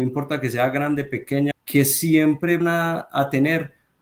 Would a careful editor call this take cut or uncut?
cut